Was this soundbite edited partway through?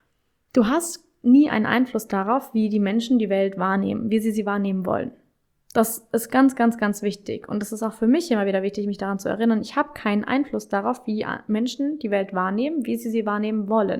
no; 0 cuts

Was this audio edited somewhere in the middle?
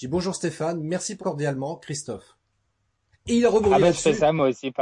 yes; 1 cut; at 1.2 s

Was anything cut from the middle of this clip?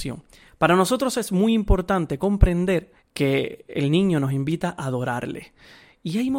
yes; 1 cut; at 3.0 s

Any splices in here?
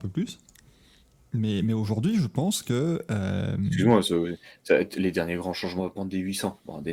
yes; 1 cut; at 5.8 s

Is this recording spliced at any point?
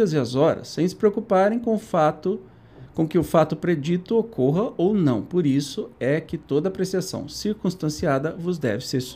no; 0 cuts

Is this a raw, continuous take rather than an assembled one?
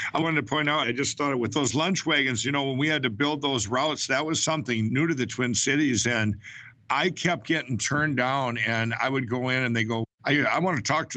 yes; 0 cuts

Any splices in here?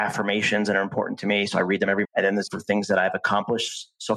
yes; 2 cuts; at 2.0 s, 2.5 s

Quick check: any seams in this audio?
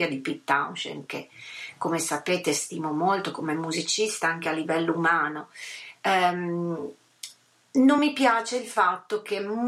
no; 0 cuts

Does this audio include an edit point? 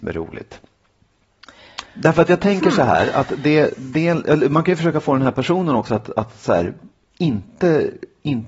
yes; 1 cut; at 1.8 s

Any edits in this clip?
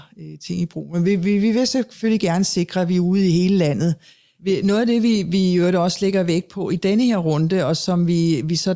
no; 0 cuts

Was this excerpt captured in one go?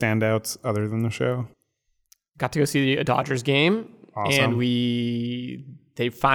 yes; 0 cuts

